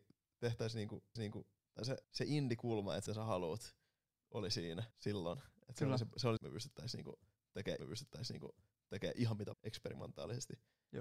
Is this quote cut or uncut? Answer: cut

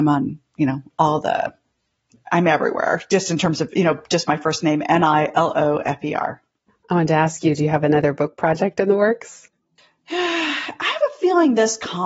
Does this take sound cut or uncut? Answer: uncut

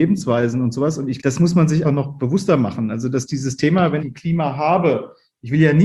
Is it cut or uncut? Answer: cut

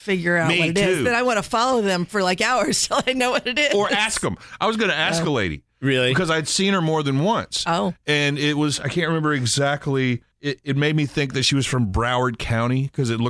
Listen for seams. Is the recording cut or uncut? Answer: cut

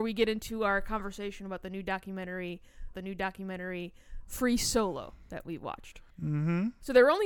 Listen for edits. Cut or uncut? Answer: cut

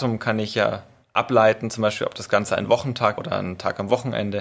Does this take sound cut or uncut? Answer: cut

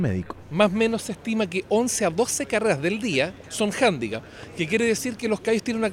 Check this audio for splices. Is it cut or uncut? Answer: uncut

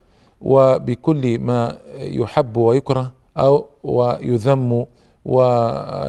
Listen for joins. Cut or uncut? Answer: cut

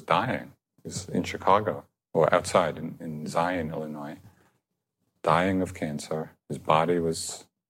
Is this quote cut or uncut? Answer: uncut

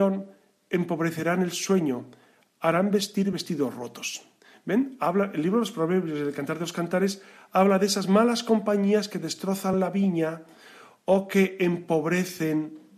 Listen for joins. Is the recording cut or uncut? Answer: uncut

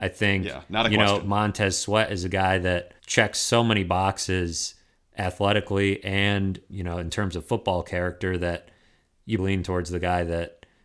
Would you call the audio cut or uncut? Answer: cut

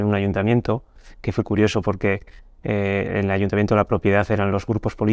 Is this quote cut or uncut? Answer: uncut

